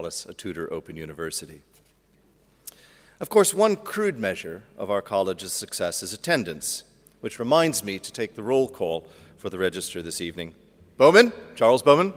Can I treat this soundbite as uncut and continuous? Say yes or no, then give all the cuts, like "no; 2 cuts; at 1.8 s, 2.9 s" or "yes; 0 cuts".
yes; 0 cuts